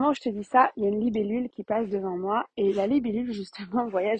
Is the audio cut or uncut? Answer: uncut